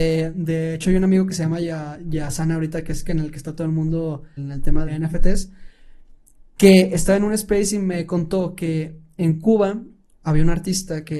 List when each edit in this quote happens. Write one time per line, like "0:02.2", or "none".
0:04.4
0:04.9